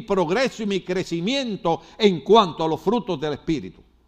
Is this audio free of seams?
yes; 0 cuts

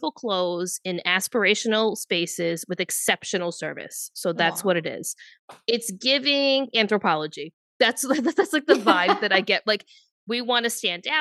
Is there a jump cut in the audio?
no; 0 cuts

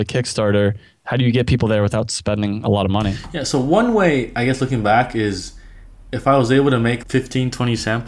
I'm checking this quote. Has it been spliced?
yes; 1 cut; at 7.0 s

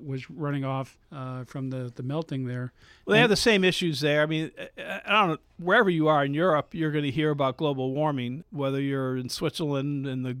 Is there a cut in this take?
yes; 2 cuts; at 1.0 s, 8.4 s

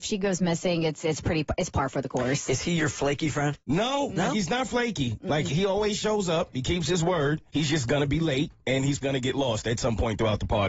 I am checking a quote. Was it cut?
yes; 5 cuts; at 3.6 s, 5.5 s, 7.5 s, 8.6 s, 9.0 s

